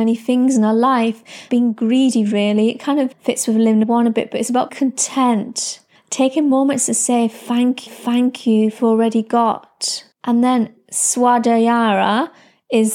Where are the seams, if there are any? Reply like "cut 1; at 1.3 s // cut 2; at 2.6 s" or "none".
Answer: cut 1; at 1.5 s // cut 2; at 3.1 s // cut 3; at 3.8 s // cut 4; at 4.7 s // cut 5; at 6.0 s // cut 6; at 7.9 s // cut 7; at 8.8 s // cut 8; at 10.1 s